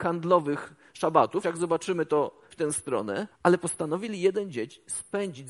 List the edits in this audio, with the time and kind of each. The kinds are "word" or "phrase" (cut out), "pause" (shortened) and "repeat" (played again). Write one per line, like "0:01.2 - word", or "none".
0:01.4 - word
0:02.5 - word
0:03.3 - pause